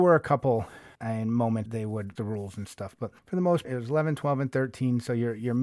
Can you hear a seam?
yes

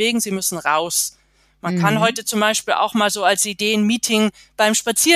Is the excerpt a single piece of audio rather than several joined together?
yes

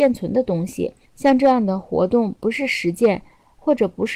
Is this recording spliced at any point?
yes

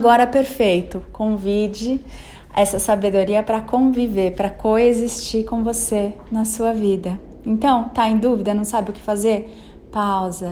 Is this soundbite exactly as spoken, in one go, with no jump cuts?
yes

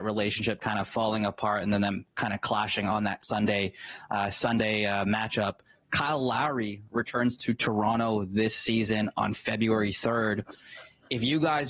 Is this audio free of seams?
yes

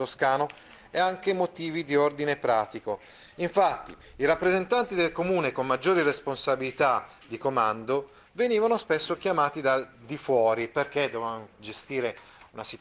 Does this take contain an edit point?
no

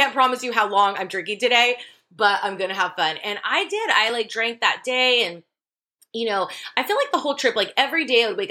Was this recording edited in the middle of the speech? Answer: no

